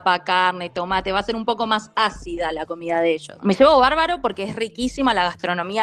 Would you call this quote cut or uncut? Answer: uncut